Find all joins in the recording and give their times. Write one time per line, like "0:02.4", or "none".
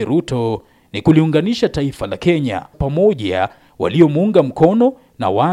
0:02.7